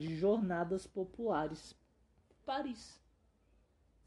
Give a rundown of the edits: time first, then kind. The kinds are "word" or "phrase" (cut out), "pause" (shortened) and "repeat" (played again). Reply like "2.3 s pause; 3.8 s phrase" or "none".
2.4 s word